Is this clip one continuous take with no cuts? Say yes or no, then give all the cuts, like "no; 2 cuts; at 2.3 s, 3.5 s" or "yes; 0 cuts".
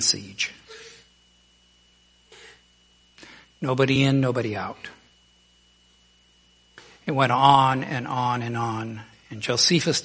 yes; 0 cuts